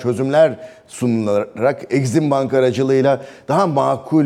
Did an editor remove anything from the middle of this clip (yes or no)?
no